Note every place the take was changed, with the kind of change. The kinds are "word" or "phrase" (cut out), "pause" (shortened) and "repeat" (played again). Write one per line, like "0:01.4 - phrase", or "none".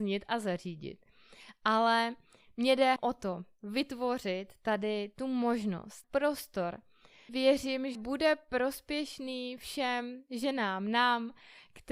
0:03.0 - word
0:06.0 - word
0:07.3 - word
0:07.9 - word